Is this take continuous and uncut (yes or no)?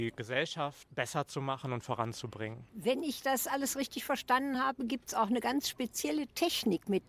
yes